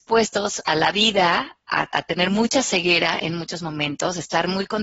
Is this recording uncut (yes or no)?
no